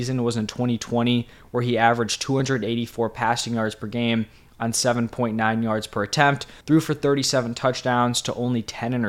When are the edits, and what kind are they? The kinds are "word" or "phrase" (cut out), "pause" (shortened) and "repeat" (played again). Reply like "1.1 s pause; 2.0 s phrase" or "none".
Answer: 6.6 s pause